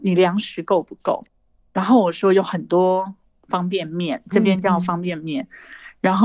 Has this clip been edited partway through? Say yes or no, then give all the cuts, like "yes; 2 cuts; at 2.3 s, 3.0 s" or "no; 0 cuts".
no; 0 cuts